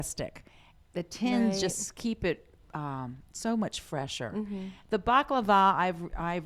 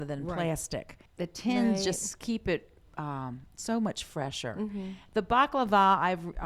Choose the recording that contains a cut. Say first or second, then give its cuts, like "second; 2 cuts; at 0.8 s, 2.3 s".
second; 1 cut; at 1.1 s